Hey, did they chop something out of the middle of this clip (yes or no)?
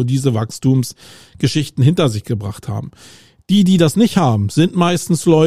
no